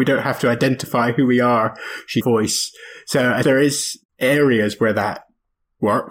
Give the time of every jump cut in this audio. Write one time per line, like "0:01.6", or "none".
0:02.2
0:03.4
0:04.1